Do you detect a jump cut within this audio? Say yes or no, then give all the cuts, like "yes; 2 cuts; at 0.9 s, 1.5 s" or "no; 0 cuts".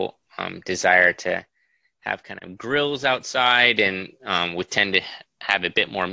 no; 0 cuts